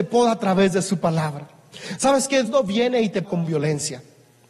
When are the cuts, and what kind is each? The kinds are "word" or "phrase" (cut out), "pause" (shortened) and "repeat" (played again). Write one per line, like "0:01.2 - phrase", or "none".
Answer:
0:02.5 - word
0:03.2 - word